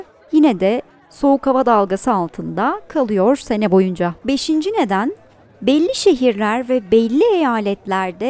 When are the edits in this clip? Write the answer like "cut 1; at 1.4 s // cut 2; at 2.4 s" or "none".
cut 1; at 4.2 s